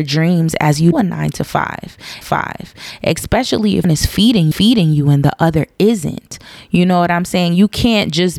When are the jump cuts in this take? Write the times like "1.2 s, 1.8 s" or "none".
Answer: 0.9 s, 2.2 s, 3.8 s, 4.5 s

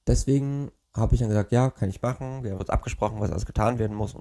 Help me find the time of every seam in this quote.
2.6 s

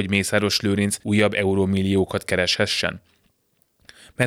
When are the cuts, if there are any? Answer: 1.0 s

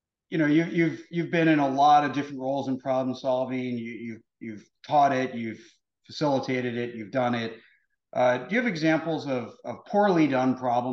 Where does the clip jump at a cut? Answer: none

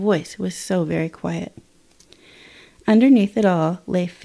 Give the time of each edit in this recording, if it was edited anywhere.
none

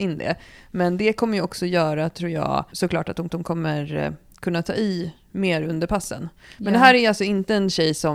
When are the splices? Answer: 2.7 s, 3.3 s

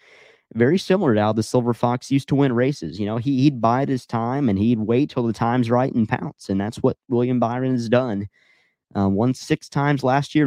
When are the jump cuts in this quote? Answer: none

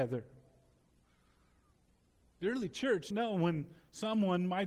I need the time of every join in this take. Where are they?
3.1 s

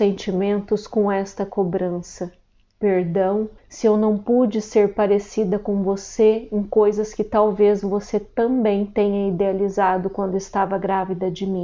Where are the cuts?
3.6 s

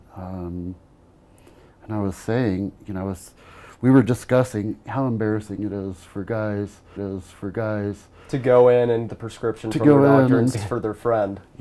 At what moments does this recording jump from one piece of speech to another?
7.0 s, 9.1 s, 10.5 s

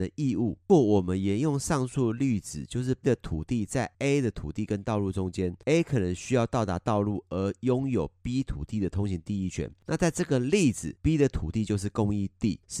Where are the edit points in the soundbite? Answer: 3.0 s

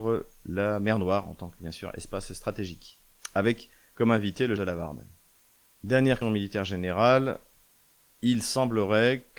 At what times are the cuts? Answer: 4.6 s, 6.2 s

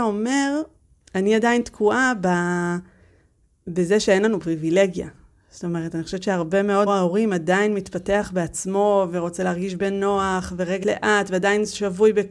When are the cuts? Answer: 6.9 s, 10.8 s

